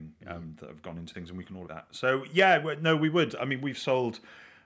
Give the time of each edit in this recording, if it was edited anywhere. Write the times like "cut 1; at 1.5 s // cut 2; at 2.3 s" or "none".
cut 1; at 1.1 s // cut 2; at 1.7 s